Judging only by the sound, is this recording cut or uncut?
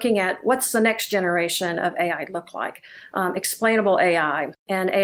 uncut